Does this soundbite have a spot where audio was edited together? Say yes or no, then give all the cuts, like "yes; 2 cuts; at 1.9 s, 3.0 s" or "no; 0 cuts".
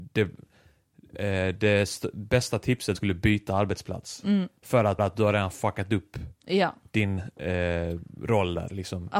yes; 3 cuts; at 2.9 s, 4.6 s, 5.0 s